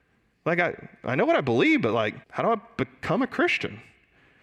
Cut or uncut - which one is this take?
cut